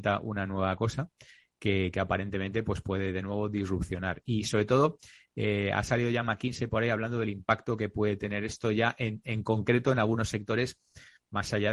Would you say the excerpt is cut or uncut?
uncut